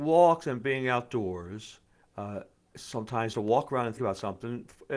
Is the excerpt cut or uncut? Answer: cut